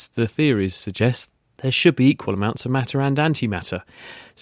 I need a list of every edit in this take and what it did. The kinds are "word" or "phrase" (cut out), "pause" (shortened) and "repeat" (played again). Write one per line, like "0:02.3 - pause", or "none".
none